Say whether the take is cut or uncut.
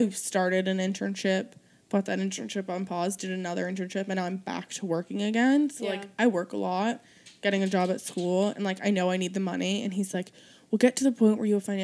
uncut